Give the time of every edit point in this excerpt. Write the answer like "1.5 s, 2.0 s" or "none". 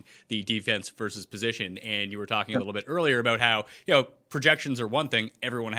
none